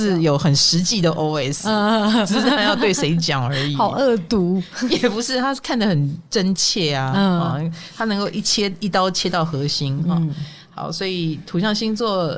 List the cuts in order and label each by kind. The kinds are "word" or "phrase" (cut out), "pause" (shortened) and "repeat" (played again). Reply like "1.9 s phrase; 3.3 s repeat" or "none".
6.3 s pause